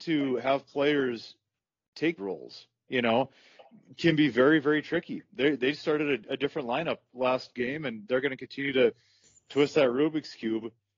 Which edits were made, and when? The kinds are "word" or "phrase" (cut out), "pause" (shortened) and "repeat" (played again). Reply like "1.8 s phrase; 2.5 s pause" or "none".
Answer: 2.2 s word